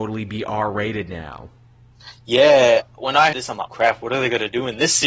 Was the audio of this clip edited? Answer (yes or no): yes